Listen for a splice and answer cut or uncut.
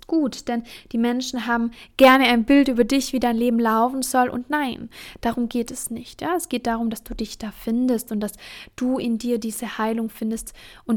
uncut